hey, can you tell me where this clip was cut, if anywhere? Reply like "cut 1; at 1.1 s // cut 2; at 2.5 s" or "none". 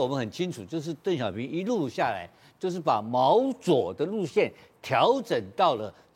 none

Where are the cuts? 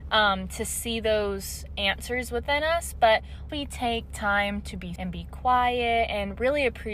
cut 1; at 3.5 s // cut 2; at 5.0 s

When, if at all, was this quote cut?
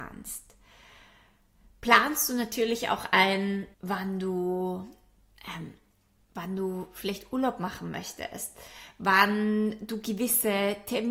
cut 1; at 3.7 s

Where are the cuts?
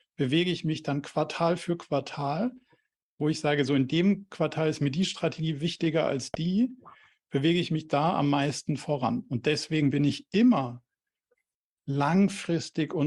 none

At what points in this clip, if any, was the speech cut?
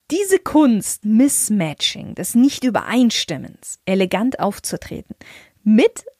cut 1; at 1.0 s // cut 2; at 3.8 s

